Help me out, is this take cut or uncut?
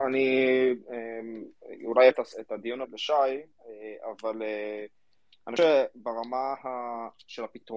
cut